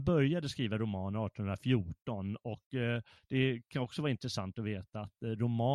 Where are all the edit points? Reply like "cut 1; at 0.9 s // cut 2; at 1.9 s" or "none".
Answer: none